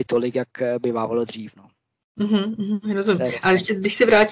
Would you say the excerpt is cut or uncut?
uncut